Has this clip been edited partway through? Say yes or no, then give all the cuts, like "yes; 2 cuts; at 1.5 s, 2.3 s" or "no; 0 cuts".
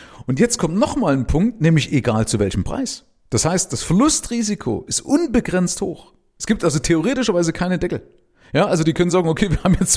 no; 0 cuts